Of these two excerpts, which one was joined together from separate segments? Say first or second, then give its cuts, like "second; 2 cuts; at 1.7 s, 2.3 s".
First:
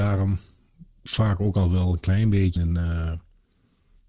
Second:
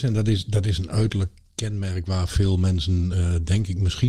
first; 1 cut; at 2.6 s